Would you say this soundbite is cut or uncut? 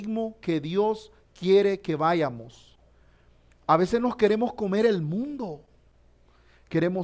uncut